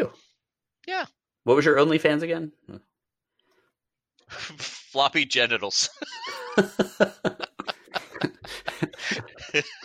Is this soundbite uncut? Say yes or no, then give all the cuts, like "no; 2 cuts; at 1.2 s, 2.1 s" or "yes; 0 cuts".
yes; 0 cuts